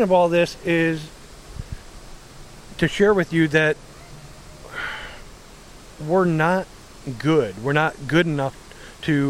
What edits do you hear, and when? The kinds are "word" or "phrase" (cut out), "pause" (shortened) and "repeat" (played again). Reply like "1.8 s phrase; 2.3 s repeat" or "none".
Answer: none